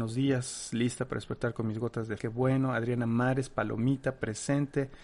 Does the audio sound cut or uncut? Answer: cut